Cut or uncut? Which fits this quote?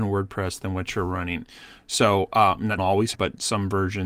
cut